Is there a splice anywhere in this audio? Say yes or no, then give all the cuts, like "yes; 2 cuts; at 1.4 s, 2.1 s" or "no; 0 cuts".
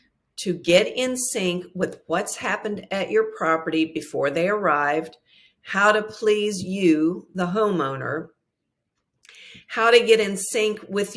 no; 0 cuts